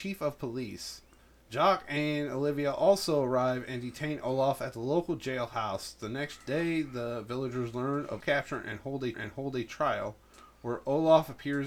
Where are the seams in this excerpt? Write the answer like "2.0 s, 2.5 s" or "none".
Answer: 1.2 s, 8.2 s, 9.1 s